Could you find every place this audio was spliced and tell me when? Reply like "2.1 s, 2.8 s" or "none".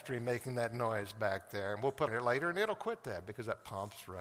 2.1 s

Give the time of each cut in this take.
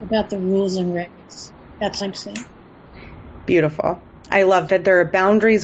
2.0 s, 4.7 s

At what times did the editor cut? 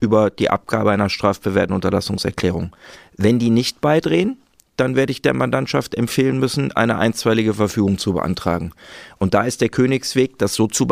none

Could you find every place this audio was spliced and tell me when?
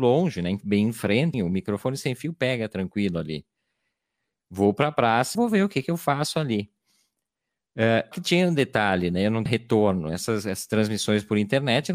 1.3 s, 5.3 s, 8.1 s, 9.5 s

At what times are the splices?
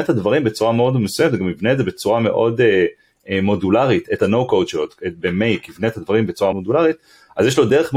6.5 s

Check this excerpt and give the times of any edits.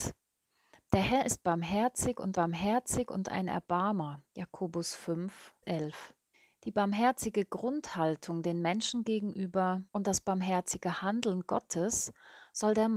2.3 s, 4.3 s, 5.6 s, 6.3 s, 9.9 s

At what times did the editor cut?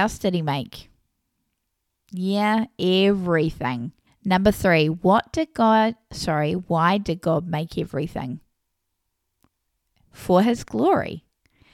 4.1 s

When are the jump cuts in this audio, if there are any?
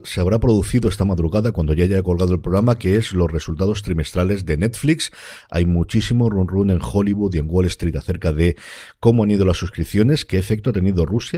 none

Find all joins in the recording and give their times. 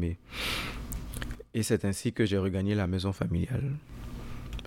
none

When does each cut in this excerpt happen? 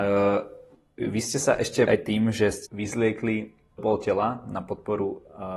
1.9 s, 2.7 s, 3.8 s

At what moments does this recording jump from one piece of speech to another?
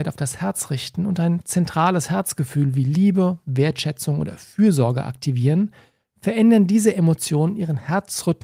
none

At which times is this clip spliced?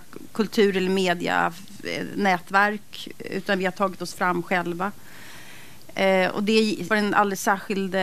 6.9 s

